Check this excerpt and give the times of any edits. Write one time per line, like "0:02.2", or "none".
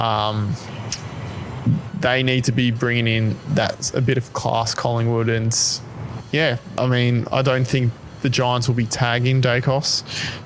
0:06.8